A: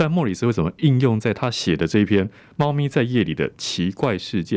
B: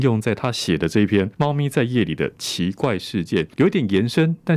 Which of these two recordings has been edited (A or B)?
B